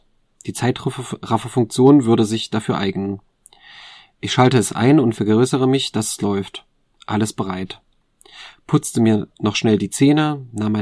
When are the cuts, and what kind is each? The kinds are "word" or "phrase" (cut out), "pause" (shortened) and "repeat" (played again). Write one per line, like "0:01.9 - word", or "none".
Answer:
none

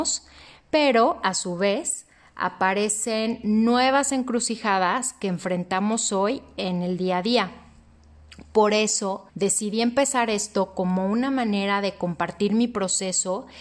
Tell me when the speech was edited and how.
0:09.3 - pause

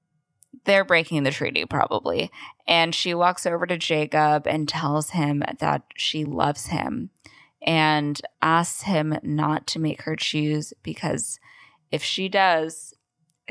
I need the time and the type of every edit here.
0:08.3 - pause

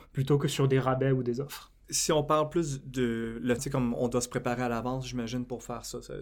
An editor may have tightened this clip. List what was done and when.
0:03.6 - word

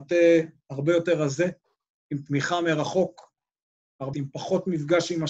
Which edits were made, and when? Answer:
0:04.1 - phrase

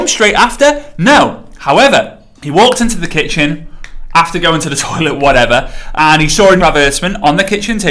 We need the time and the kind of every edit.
0:02.4 - pause
0:06.0 - word
0:06.6 - word

